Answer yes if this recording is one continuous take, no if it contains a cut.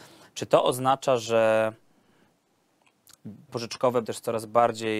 no